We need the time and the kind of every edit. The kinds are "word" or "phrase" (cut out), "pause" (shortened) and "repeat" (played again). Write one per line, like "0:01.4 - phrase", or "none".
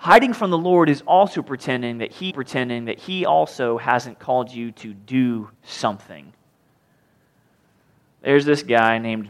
0:02.3 - repeat
0:05.5 - pause